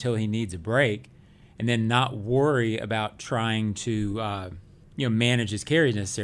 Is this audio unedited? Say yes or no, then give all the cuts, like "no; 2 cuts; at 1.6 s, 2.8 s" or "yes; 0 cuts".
yes; 0 cuts